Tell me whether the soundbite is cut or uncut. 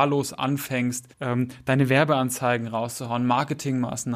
cut